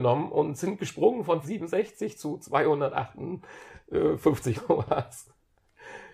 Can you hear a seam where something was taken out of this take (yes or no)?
yes